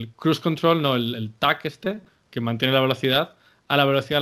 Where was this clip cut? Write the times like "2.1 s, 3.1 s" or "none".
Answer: 2.1 s